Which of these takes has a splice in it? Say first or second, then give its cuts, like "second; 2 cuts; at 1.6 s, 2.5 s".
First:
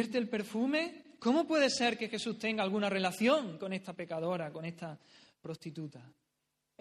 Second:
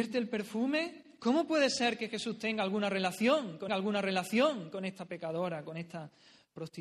second; 1 cut; at 3.7 s